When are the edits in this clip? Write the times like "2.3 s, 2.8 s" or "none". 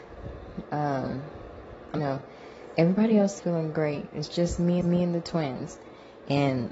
2.0 s, 3.4 s, 4.8 s

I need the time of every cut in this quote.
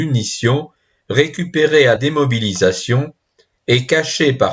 2.0 s

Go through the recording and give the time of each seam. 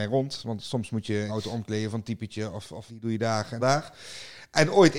1.3 s, 2.9 s, 3.6 s

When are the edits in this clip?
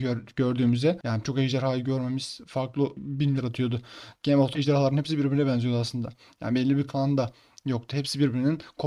1.2 s, 3.4 s, 4.5 s, 6.9 s

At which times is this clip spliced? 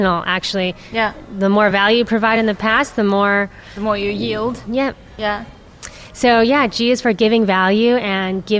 none

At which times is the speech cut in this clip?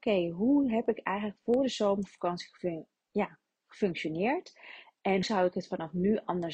5.2 s

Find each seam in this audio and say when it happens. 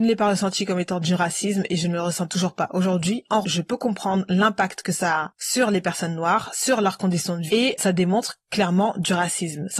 2.3 s, 3.4 s, 7.5 s, 7.8 s

